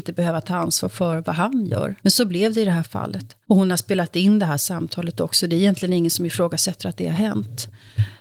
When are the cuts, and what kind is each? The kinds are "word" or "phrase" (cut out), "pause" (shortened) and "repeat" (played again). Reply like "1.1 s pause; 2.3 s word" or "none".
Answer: 2.0 s pause; 3.4 s pause